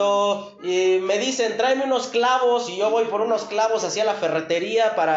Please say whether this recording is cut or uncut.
uncut